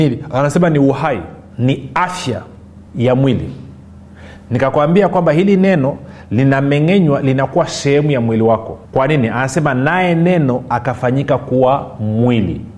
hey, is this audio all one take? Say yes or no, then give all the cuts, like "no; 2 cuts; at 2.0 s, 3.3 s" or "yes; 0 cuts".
no; 3 cuts; at 1.5 s, 2.9 s, 8.9 s